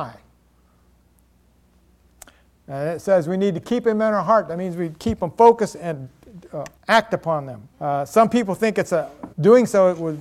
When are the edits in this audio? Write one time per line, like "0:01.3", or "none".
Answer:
0:06.8
0:07.7
0:09.3